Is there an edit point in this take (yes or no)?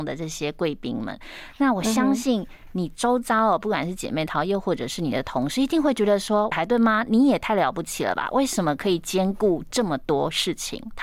yes